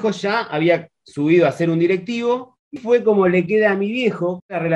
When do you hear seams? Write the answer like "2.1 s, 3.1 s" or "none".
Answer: 2.8 s